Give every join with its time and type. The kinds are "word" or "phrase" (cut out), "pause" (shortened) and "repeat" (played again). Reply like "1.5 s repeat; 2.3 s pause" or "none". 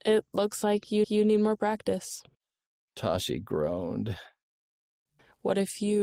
1.0 s repeat